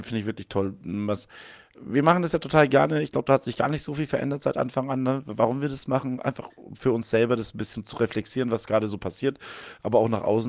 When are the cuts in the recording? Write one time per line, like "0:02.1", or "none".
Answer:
none